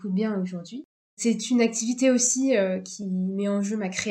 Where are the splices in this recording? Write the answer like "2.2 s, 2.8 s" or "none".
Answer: none